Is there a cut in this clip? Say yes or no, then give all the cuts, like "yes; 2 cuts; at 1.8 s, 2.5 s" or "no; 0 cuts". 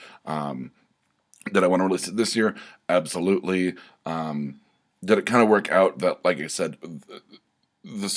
no; 0 cuts